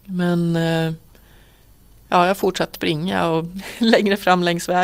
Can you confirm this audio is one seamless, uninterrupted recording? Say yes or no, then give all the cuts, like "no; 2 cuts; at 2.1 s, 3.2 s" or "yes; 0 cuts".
no; 1 cut; at 2.7 s